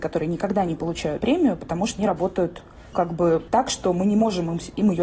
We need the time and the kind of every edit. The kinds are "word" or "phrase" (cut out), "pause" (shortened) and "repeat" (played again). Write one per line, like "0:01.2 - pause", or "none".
0:01.2 - word
0:02.0 - word
0:02.9 - word